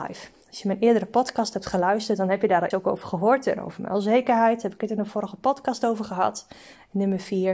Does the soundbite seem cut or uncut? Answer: cut